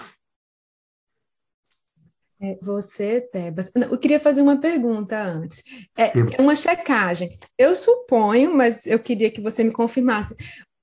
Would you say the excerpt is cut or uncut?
cut